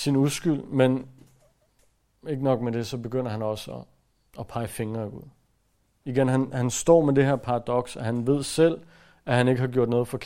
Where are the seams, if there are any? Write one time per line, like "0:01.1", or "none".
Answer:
none